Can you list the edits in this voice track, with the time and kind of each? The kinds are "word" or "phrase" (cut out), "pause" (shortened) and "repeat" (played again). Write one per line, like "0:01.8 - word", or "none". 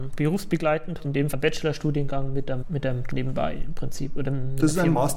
0:01.0 - word
0:01.3 - word
0:02.6 - word
0:03.1 - word

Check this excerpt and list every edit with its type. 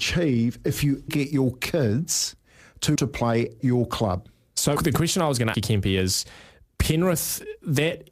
0:01.1 - word
0:03.0 - word
0:03.6 - word
0:04.8 - word
0:05.5 - word

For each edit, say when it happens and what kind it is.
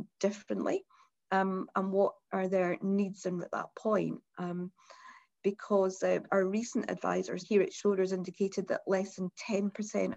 0:03.4 - word
0:06.3 - word
0:07.4 - word

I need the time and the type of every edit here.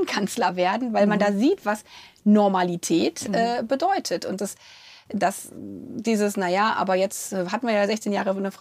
0:04.4 - word

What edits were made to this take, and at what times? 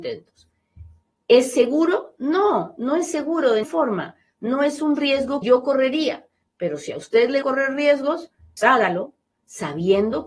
0:03.6 - word
0:05.4 - word
0:07.4 - word
0:08.6 - word

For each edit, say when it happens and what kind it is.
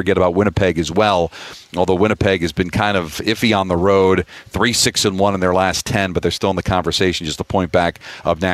none

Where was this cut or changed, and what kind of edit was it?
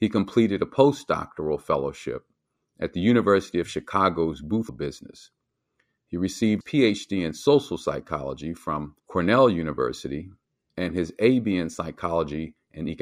0:04.7 - word
0:06.6 - word
0:09.0 - pause

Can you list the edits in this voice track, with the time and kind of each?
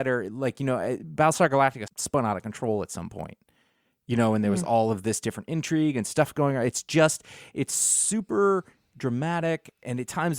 none

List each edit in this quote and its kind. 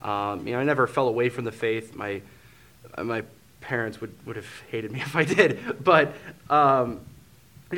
none

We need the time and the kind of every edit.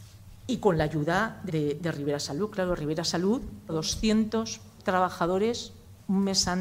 0:01.5 - phrase
0:03.7 - word

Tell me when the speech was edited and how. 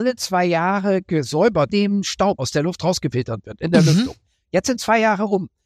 0:01.7 - phrase
0:02.4 - word

